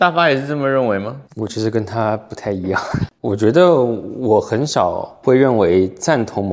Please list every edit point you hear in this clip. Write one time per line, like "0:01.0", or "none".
0:01.3

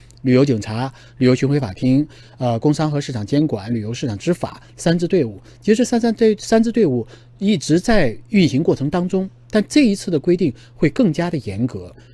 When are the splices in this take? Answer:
none

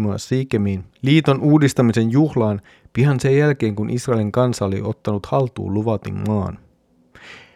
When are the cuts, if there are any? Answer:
none

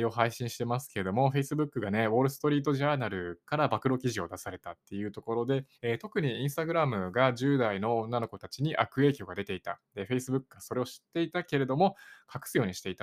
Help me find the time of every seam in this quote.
0:05.7

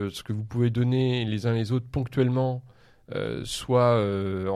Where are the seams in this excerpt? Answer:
none

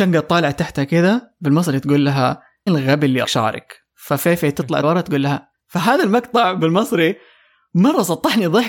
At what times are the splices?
0:02.7
0:03.2
0:04.8
0:05.5

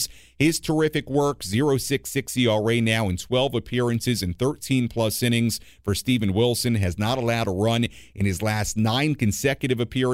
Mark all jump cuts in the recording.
none

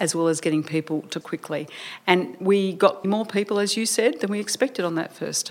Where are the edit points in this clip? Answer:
0:01.2
0:03.0

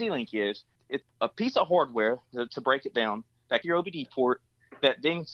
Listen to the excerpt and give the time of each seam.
0:01.0
0:03.6

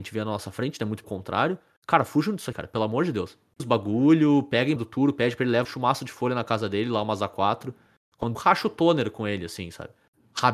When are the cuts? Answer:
0:01.0
0:02.5
0:03.6
0:04.8
0:05.6
0:08.3

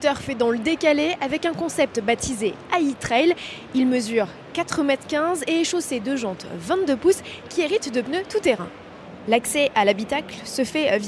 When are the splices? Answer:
none

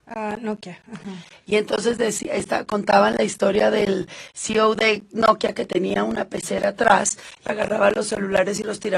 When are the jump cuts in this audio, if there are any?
0:07.5

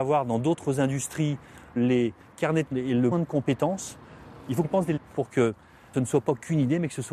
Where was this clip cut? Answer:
0:01.8
0:02.7
0:03.1
0:04.6
0:05.0
0:05.9

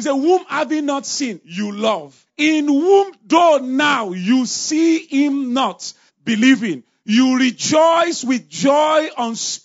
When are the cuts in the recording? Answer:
0:02.3
0:06.1

